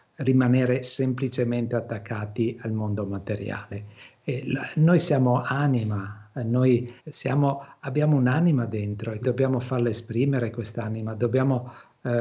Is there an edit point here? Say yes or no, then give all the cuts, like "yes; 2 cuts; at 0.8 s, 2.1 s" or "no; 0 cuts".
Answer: yes; 2 cuts; at 7.0 s, 9.2 s